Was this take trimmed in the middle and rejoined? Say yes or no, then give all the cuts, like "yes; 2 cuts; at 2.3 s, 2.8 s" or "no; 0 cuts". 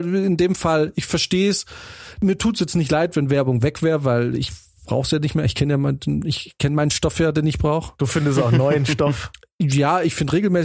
no; 0 cuts